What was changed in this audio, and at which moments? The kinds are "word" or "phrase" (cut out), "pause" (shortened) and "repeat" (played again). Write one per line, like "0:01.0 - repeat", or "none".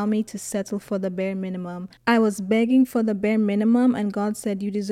0:02.0 - pause